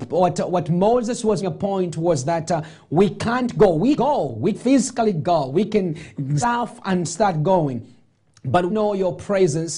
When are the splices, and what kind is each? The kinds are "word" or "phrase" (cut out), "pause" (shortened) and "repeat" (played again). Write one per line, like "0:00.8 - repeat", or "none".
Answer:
0:01.4 - word
0:04.0 - word
0:04.5 - word
0:06.4 - word
0:08.7 - word

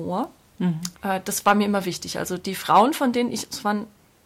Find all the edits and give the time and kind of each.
0:00.9 - pause

